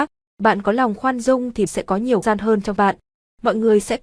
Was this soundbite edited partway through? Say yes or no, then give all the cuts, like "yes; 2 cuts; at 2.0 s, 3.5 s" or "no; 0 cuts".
yes; 3 cuts; at 1.7 s, 2.2 s, 2.8 s